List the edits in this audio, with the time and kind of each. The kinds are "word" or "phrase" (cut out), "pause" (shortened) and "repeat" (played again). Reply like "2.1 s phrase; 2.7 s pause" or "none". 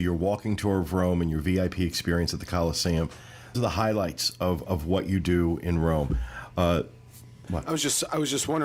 3.5 s word